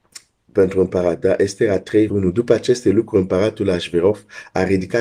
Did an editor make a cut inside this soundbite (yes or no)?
yes